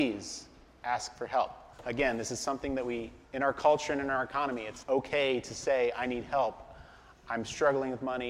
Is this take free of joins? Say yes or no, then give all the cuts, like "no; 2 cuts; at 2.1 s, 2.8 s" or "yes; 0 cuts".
no; 3 cuts; at 1.7 s, 3.2 s, 4.8 s